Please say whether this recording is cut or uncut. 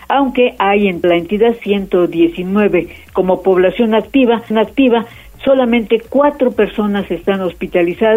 cut